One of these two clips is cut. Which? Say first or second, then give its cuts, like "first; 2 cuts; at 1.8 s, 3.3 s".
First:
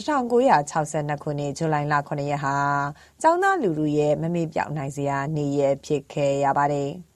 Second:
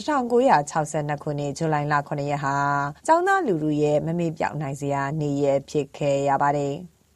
second; 1 cut; at 3.0 s